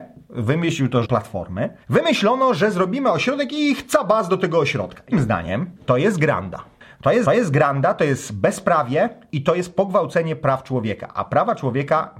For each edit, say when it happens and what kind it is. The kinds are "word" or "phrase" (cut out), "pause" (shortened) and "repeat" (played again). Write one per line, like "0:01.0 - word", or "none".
0:01.0 - phrase
0:01.8 - pause
0:05.1 - word
0:05.8 - pause
0:07.2 - repeat